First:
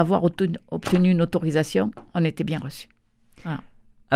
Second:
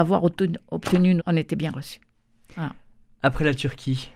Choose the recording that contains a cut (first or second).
second